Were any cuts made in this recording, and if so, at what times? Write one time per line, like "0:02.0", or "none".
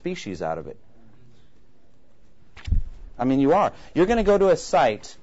none